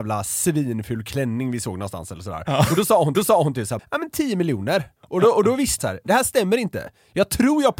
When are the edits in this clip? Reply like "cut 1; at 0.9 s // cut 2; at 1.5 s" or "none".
cut 1; at 3.1 s // cut 2; at 3.8 s // cut 3; at 5.0 s // cut 4; at 5.8 s

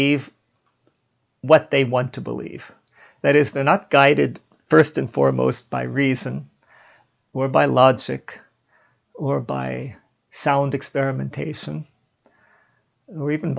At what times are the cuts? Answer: none

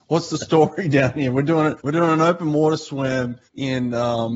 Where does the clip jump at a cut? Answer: cut 1; at 1.8 s // cut 2; at 3.5 s

